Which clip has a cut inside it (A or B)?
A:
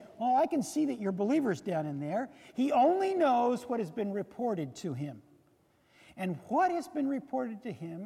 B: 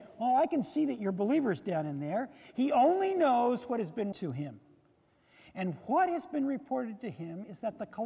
B